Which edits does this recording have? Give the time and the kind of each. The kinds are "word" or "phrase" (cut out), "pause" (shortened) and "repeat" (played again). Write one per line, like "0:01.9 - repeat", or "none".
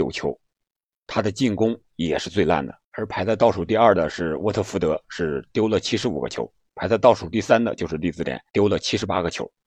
0:02.8 - pause
0:08.5 - pause